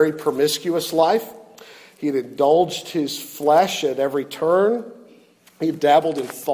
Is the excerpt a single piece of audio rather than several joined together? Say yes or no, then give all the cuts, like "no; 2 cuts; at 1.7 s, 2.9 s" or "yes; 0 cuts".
yes; 0 cuts